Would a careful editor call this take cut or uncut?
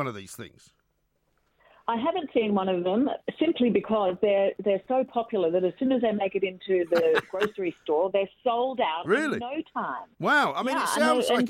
uncut